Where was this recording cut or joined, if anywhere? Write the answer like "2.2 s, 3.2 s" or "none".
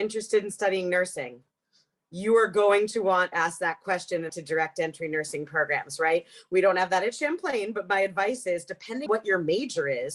3.3 s, 4.3 s, 9.1 s